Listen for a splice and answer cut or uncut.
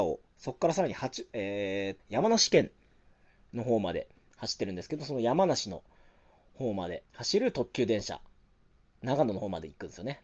cut